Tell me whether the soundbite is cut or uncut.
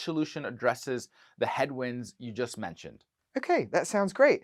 uncut